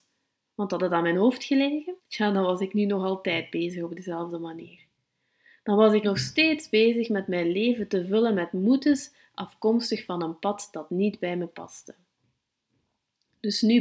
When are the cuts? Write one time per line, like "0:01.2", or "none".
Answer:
0:02.0
0:06.0